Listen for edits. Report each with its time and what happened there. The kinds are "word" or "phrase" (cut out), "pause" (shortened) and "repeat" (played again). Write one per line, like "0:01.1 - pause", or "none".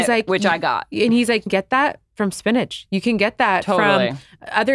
0:01.5 - phrase